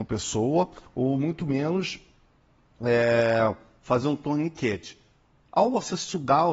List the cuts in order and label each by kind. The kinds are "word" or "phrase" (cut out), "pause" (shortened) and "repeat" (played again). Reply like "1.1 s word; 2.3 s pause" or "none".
none